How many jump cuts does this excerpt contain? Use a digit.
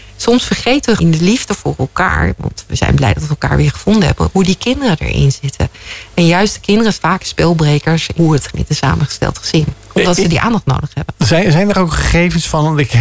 4